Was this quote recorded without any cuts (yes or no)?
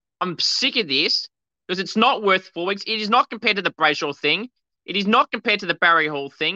yes